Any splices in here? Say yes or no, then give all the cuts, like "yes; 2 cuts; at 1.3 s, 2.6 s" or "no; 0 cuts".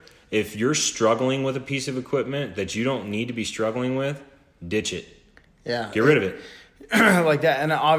no; 0 cuts